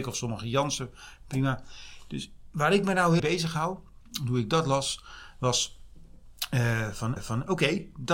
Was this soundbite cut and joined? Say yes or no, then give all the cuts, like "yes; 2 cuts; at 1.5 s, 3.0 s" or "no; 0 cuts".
yes; 2 cuts; at 3.2 s, 7.2 s